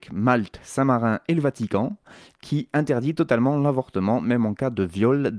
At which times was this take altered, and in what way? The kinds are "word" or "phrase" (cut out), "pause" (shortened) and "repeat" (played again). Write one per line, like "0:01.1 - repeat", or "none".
none